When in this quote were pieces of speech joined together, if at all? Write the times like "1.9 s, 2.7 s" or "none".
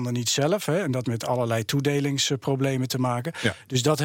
1.0 s